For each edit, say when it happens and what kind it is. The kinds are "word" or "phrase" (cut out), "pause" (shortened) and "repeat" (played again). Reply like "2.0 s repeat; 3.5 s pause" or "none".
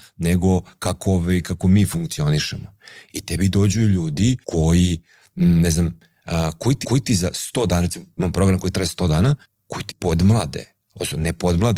4.4 s pause; 6.8 s repeat; 9.4 s pause; 9.9 s word